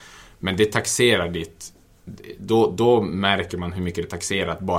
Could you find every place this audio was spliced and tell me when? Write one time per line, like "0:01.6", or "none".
none